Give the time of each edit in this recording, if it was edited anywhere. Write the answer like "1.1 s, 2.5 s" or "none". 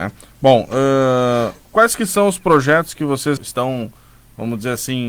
1.6 s, 3.4 s